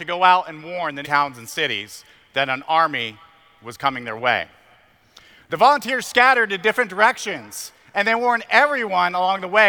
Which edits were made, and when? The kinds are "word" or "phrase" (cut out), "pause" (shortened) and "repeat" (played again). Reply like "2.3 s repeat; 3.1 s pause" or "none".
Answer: 1.0 s word